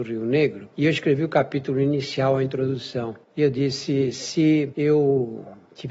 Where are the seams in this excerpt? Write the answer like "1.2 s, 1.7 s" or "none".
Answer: 3.2 s